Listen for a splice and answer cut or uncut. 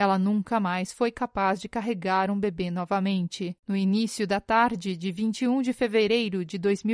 cut